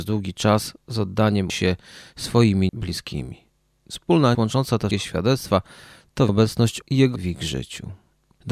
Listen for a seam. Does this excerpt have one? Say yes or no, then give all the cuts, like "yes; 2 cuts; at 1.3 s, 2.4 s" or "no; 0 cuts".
yes; 7 cuts; at 1.5 s, 2.7 s, 4.3 s, 4.9 s, 6.3 s, 6.8 s, 7.2 s